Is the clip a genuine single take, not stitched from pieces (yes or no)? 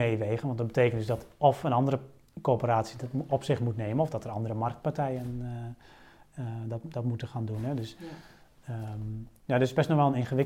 yes